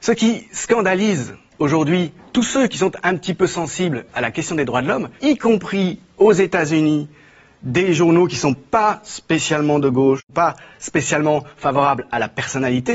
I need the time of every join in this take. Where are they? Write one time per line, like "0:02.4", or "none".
none